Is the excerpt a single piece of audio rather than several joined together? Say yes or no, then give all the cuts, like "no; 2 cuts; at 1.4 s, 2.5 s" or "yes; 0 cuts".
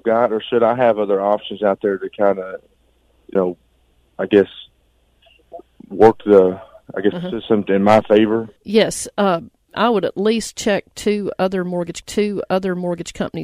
no; 5 cuts; at 3.4 s, 7.1 s, 8.6 s, 9.7 s, 12.0 s